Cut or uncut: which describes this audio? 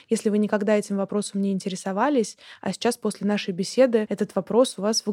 uncut